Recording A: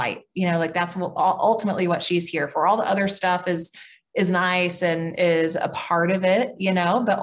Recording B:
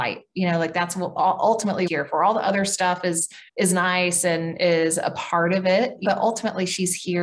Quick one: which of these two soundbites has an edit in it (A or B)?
B